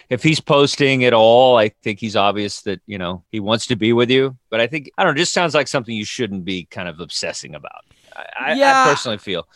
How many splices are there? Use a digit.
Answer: 3